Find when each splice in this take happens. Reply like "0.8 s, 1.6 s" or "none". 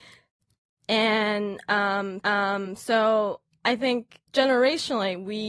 2.2 s, 4.3 s